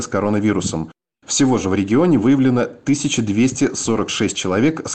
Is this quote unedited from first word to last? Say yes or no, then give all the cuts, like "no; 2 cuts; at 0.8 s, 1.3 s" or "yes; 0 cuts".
yes; 0 cuts